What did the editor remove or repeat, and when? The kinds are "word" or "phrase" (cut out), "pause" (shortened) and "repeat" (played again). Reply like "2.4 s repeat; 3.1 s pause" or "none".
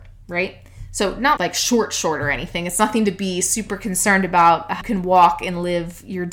1.4 s word; 4.8 s word